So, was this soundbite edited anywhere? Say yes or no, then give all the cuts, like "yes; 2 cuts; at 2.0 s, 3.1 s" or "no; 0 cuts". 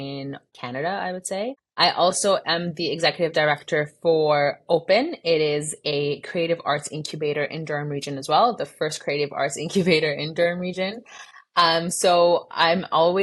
no; 0 cuts